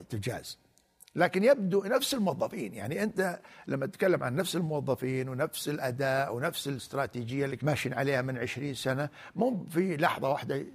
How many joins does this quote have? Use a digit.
1